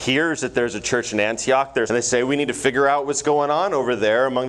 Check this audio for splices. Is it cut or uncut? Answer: cut